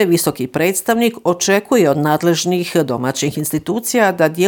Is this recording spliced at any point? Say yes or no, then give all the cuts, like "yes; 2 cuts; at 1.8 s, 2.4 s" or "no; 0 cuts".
no; 0 cuts